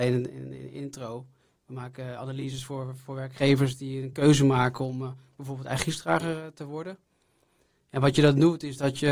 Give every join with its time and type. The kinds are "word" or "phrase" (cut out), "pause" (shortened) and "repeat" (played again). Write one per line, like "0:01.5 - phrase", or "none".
none